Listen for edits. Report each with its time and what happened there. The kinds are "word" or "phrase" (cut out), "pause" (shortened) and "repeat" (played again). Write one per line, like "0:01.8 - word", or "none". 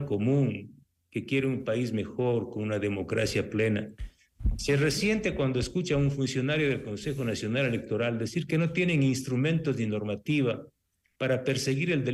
none